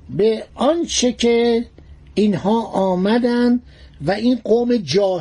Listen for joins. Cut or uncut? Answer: uncut